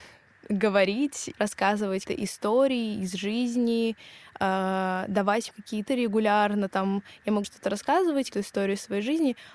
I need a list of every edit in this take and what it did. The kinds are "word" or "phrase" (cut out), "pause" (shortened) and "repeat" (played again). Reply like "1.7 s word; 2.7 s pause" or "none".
1.3 s word; 2.1 s word; 5.5 s word; 5.9 s word; 7.4 s word; 8.3 s word